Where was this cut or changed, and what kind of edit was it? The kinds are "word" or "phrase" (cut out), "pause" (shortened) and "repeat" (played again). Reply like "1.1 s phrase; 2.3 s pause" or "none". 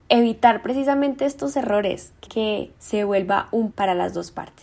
2.3 s word; 2.7 s pause; 3.7 s phrase